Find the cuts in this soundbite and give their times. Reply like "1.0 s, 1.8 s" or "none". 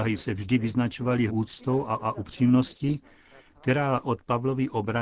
1.3 s, 2.0 s, 4.0 s